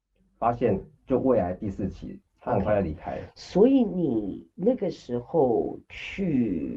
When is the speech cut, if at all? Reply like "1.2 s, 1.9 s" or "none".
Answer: 1.0 s, 2.3 s